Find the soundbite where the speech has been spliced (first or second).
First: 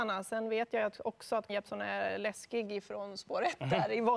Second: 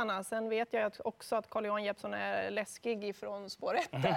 first